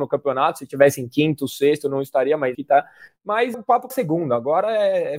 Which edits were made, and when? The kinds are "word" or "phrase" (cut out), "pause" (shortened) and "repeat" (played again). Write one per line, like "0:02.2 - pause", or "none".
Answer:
0:02.5 - word
0:03.5 - word
0:03.9 - word